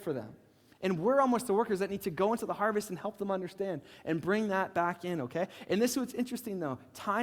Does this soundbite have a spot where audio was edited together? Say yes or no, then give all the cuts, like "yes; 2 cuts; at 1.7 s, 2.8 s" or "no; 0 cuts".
no; 0 cuts